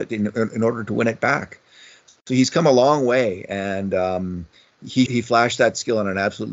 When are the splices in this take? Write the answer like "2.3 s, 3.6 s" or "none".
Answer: 5.1 s